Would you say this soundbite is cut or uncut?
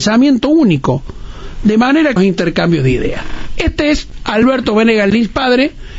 cut